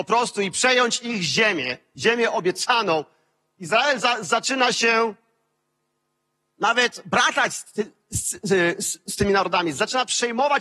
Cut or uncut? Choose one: uncut